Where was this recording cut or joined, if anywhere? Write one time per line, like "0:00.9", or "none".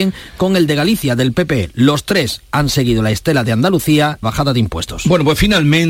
0:04.2